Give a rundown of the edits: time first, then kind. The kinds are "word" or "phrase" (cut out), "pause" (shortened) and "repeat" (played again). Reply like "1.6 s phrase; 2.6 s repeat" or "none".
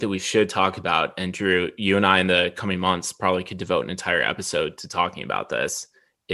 none